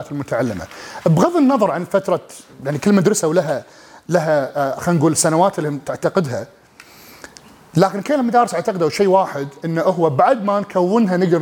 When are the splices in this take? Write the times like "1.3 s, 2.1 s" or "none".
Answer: none